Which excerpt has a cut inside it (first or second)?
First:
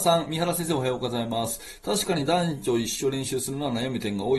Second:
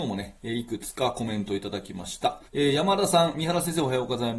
second